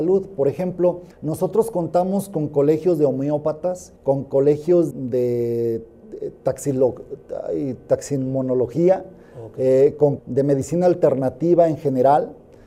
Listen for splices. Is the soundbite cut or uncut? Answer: cut